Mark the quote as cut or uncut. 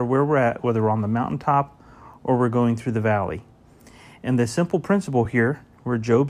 uncut